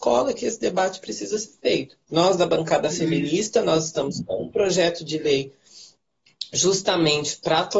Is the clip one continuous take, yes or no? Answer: no